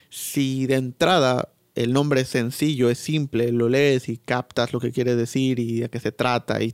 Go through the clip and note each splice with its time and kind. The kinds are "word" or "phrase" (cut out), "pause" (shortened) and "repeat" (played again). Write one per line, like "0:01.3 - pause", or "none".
none